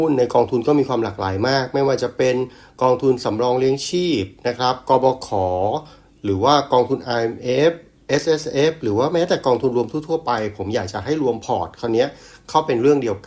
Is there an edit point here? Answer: no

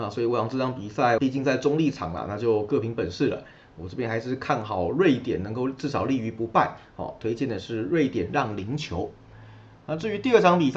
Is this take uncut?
no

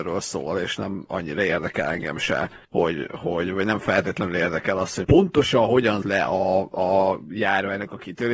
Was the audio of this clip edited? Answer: yes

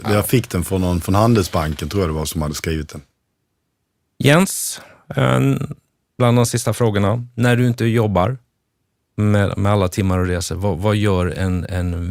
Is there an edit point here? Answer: no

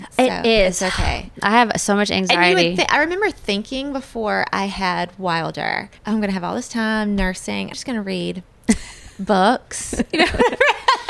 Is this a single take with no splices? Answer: no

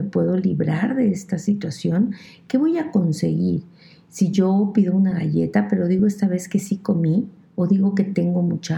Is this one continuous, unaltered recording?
yes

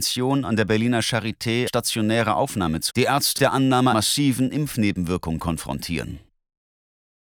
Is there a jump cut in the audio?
yes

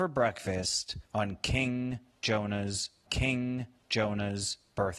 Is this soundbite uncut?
no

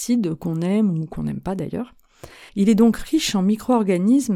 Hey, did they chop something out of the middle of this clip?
yes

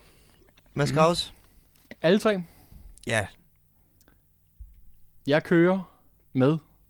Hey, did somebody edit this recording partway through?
no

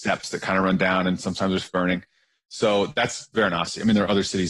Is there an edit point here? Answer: yes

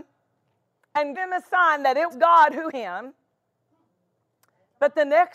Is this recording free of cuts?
no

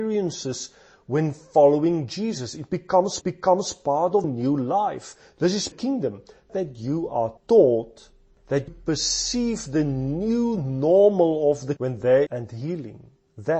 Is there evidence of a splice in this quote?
yes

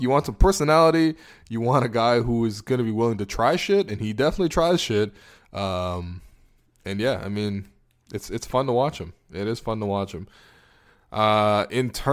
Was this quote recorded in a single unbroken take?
yes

